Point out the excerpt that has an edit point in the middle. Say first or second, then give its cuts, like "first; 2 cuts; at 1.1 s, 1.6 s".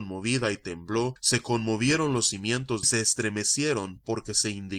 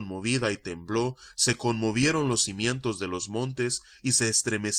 first; 2 cuts; at 1.2 s, 2.8 s